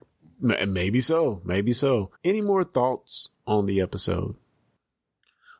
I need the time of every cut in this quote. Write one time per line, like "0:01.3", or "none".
0:02.1